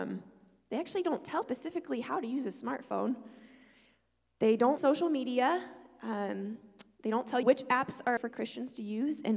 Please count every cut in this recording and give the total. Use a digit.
4